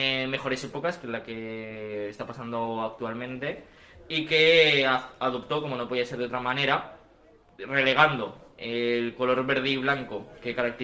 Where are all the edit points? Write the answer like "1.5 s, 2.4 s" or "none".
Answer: none